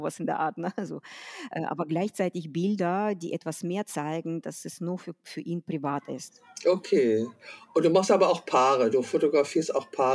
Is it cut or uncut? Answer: uncut